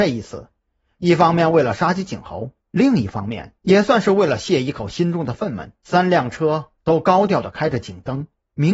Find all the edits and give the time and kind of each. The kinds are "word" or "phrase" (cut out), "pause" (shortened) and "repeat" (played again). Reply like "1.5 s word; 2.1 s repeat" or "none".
2.6 s pause; 3.6 s pause; 5.8 s pause